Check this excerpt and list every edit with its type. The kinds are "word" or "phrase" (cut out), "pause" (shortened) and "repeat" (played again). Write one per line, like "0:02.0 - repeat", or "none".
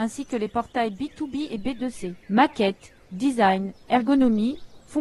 0:02.2 - pause